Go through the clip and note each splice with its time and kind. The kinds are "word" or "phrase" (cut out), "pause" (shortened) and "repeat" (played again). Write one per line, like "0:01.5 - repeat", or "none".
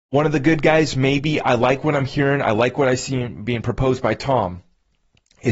none